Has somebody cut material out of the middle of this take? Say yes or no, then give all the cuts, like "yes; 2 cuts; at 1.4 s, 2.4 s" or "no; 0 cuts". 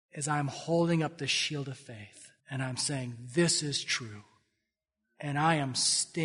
yes; 1 cut; at 2.4 s